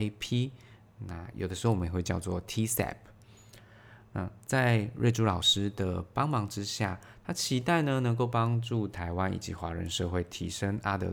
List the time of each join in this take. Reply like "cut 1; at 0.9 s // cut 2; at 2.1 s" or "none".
none

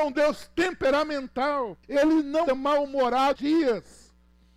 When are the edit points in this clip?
cut 1; at 1.8 s // cut 2; at 2.5 s // cut 3; at 3.4 s

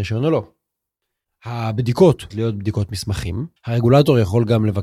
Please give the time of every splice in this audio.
cut 1; at 2.3 s // cut 2; at 3.6 s

